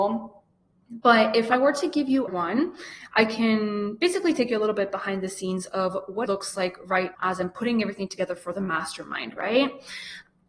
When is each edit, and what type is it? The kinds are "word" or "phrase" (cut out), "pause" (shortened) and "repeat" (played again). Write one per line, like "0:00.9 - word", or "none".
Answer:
0:02.3 - word
0:06.3 - word
0:07.1 - word